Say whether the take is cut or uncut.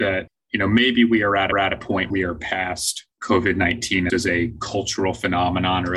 cut